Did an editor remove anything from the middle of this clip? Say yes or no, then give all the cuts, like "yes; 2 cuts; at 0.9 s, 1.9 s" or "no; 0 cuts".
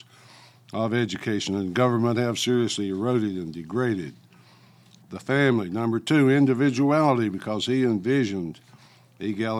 no; 0 cuts